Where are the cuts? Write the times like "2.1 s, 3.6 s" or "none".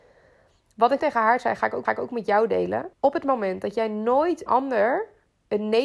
1.0 s, 1.8 s, 2.9 s, 4.5 s